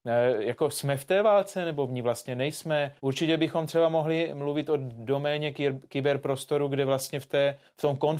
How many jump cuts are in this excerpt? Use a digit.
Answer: 1